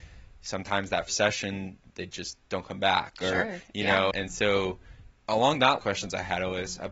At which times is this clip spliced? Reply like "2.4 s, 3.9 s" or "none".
1.1 s, 1.8 s, 4.1 s, 5.1 s, 5.8 s